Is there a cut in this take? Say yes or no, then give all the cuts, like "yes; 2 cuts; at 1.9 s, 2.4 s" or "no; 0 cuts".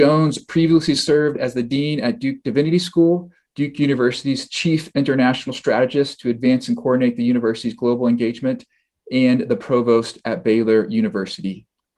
no; 0 cuts